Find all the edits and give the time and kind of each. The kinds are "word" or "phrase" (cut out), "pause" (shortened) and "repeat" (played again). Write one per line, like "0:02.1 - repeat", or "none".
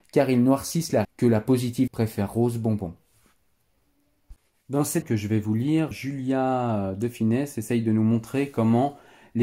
0:01.0 - word
0:01.9 - word
0:05.0 - word
0:05.9 - word